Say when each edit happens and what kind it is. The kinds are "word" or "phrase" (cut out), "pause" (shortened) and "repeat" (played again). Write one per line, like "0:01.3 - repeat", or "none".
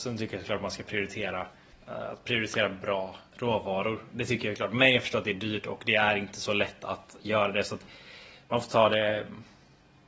0:01.8 - pause
0:03.3 - pause